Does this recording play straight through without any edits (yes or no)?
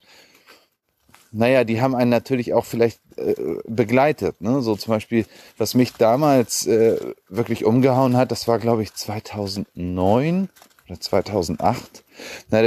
yes